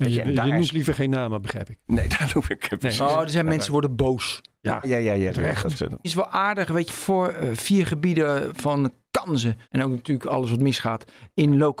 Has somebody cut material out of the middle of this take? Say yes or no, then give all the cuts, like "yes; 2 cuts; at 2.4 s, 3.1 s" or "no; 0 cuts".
yes; 4 cuts; at 4.8 s, 6.0 s, 6.9 s, 9.6 s